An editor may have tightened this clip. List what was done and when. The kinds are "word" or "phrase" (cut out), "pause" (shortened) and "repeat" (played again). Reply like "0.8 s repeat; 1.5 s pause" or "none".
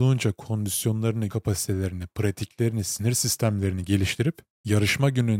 1.3 s word

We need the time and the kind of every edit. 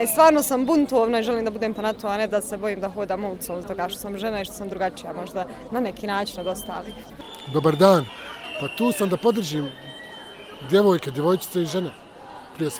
1.8 s word; 3.6 s word

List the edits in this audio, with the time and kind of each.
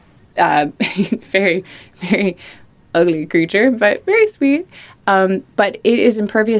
none

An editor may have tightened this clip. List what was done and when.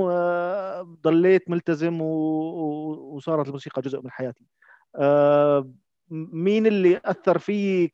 none

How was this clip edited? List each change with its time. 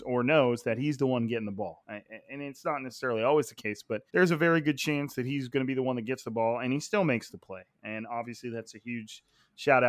4.1 s pause

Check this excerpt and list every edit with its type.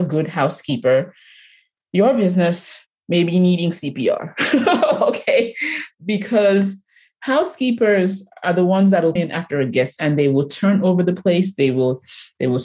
9.2 s word; 10.0 s word

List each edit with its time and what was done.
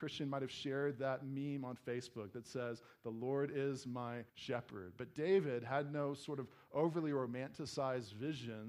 4.3 s pause

